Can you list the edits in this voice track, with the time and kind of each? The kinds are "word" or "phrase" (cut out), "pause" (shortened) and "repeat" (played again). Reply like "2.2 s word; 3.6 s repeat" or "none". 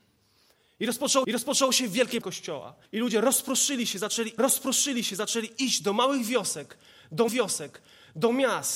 1.2 s repeat; 2.2 s word; 2.9 s pause; 4.4 s repeat; 7.3 s repeat